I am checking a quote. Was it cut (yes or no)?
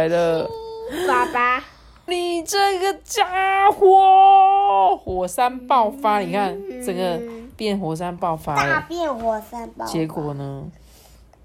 yes